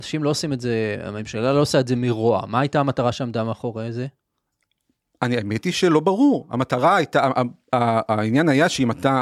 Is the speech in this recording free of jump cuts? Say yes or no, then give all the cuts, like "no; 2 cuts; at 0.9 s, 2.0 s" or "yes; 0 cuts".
yes; 0 cuts